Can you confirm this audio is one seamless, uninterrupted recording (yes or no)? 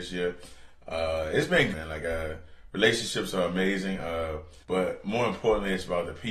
no